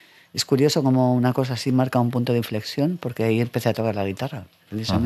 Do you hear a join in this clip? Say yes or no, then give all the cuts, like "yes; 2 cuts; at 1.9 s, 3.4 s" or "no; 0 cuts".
no; 0 cuts